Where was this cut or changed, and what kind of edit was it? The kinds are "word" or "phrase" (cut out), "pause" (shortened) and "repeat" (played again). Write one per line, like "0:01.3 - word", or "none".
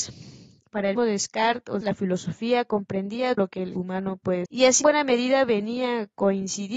0:01.0 - word
0:01.8 - word
0:03.4 - word
0:03.8 - word
0:04.5 - word
0:04.8 - word

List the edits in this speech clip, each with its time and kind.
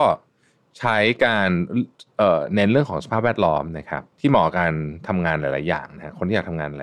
0:04.1 - pause

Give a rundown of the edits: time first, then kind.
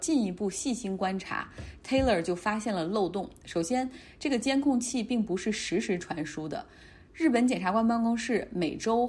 none

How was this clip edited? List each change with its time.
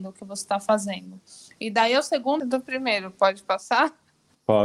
0:02.4 - phrase

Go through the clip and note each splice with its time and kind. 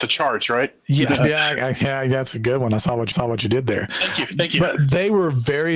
0:01.2 - word
0:03.1 - repeat

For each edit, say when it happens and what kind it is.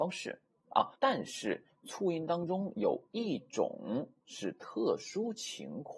0:01.0 - pause

